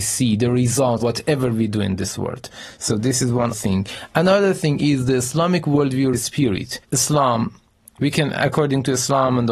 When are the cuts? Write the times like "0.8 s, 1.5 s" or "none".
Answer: 1.0 s, 3.5 s, 6.1 s, 6.8 s